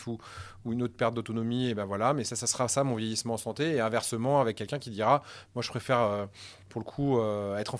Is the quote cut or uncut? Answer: uncut